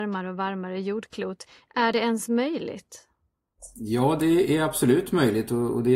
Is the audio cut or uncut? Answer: uncut